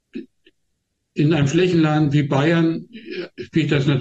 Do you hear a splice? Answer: no; 0 cuts

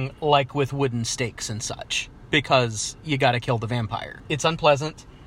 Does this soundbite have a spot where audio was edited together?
no; 0 cuts

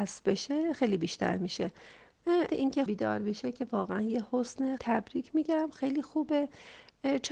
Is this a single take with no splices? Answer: no; 3 cuts; at 2.5 s, 2.9 s, 4.8 s

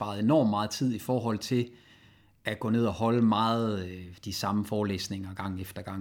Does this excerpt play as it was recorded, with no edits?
yes; 0 cuts

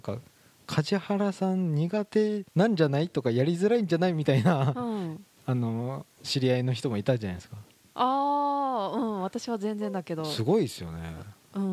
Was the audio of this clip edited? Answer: yes; 1 cut; at 2.5 s

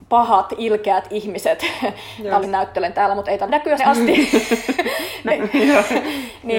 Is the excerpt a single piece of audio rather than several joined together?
no; 4 cuts; at 2.4 s, 3.5 s, 3.8 s, 5.3 s

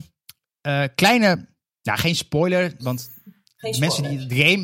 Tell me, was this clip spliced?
yes; 1 cut; at 1.7 s

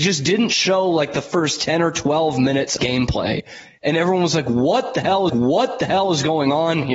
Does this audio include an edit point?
yes; 2 cuts; at 2.8 s, 5.3 s

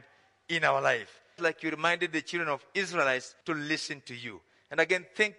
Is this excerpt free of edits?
no; 2 cuts; at 1.4 s, 3.4 s

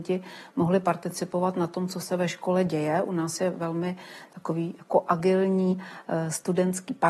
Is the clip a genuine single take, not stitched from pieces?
yes; 0 cuts

